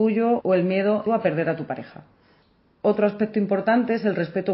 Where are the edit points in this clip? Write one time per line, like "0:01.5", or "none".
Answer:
0:01.1